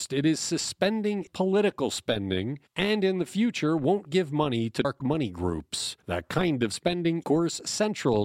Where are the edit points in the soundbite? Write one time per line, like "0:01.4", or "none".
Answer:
0:01.3
0:04.8
0:07.2